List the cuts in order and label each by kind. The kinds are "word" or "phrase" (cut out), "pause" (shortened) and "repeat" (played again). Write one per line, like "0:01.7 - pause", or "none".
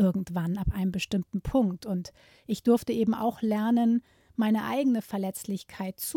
none